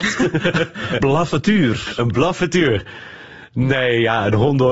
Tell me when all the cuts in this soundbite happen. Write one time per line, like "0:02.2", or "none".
0:01.0

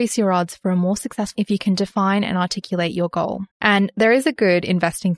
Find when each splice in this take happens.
0:01.4
0:03.5

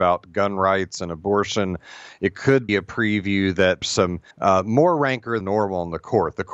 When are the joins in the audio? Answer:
0:02.7
0:03.8
0:04.3
0:05.4

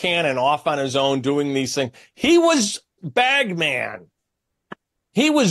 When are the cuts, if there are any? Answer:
0:03.0

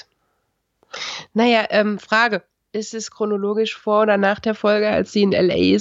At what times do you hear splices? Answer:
none

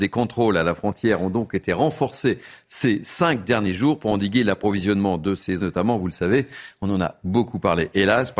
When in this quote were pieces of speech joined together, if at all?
0:05.6

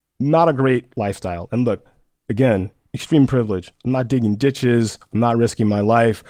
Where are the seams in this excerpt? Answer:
none

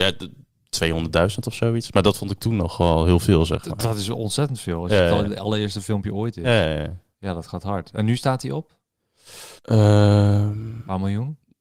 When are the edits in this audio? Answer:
0:09.6

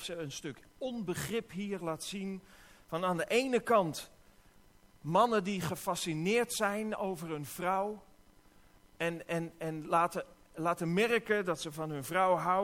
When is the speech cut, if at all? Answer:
none

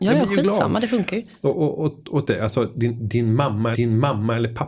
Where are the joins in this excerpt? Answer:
0:02.2
0:03.7

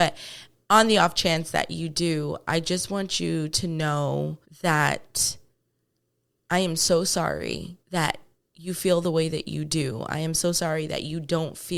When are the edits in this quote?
0:04.4
0:07.8

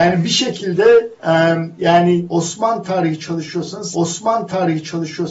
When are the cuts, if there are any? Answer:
0:03.9

